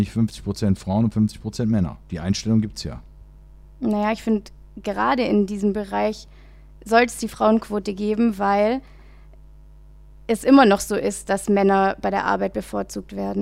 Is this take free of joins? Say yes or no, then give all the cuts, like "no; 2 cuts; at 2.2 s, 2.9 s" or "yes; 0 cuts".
yes; 0 cuts